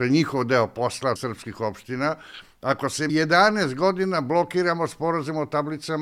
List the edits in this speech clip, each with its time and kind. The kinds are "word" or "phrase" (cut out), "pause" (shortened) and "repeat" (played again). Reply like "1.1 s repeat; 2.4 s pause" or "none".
1.2 s phrase; 3.1 s phrase